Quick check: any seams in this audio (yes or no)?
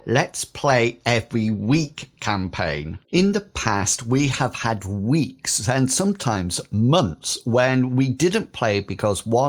yes